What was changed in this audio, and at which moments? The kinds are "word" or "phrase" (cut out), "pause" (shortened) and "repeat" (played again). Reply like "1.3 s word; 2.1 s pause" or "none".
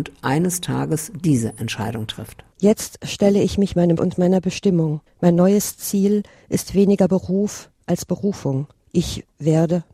4.0 s word; 5.1 s pause; 8.8 s pause